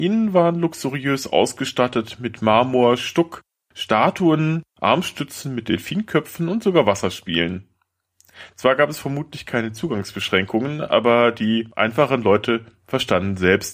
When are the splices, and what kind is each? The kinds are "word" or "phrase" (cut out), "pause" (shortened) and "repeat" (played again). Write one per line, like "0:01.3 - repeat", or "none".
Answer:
0:04.7 - pause